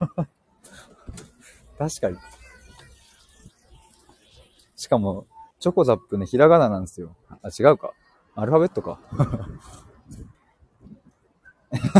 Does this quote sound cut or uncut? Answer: cut